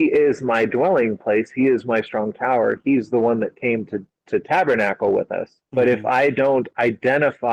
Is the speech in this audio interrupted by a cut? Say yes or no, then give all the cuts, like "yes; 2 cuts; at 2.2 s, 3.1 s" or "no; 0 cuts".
yes; 1 cut; at 5.6 s